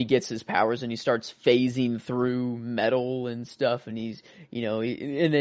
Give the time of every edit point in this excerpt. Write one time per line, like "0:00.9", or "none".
none